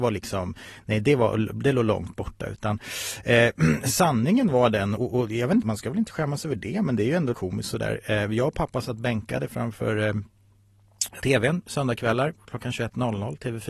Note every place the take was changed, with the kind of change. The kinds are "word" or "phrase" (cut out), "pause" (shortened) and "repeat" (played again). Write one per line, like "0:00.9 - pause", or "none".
0:05.0 - word
0:05.6 - word
0:07.3 - word
0:11.2 - word